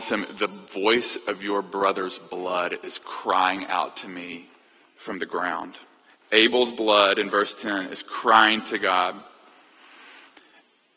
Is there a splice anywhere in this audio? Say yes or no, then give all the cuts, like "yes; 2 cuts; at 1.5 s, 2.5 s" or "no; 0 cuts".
no; 0 cuts